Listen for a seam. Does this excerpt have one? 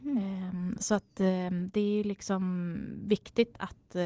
no; 0 cuts

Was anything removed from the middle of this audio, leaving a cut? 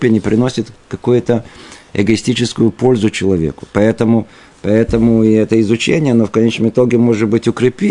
no; 0 cuts

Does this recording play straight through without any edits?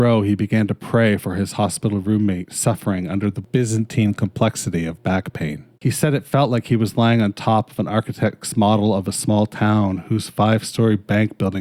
no; 1 cut; at 5.7 s

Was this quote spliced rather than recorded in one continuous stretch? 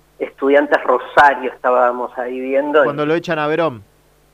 no; 0 cuts

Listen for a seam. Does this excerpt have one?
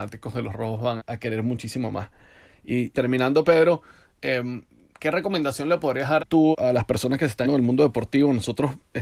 yes; 5 cuts; at 1.0 s, 2.9 s, 6.2 s, 6.5 s, 7.4 s

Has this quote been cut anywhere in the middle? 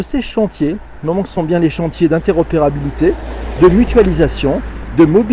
no; 0 cuts

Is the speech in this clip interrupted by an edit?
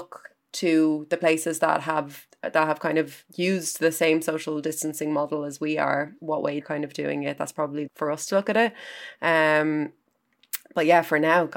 yes; 4 cuts; at 2.3 s, 6.2 s, 6.6 s, 7.9 s

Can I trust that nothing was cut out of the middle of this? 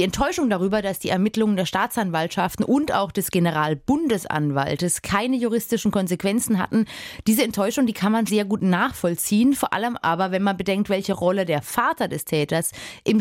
no; 1 cut; at 8.3 s

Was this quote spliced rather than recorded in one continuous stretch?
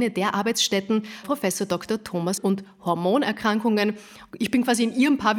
yes; 2 cuts; at 1.2 s, 2.4 s

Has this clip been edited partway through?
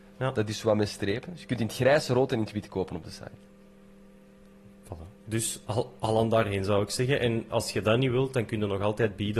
yes; 1 cut; at 5.2 s

